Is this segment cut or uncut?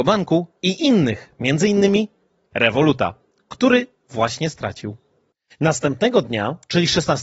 uncut